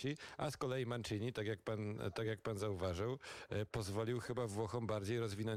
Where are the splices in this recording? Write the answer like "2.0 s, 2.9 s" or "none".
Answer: none